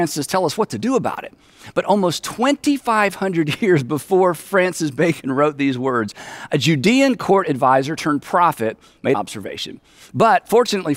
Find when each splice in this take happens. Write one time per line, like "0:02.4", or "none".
0:09.1